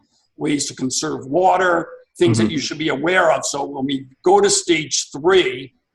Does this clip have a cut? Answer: no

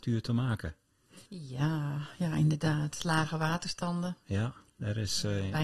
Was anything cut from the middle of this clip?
yes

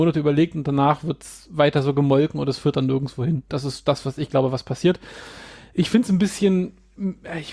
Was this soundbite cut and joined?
no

